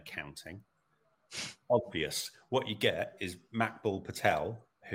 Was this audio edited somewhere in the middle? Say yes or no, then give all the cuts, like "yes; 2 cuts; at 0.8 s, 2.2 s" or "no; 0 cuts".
no; 0 cuts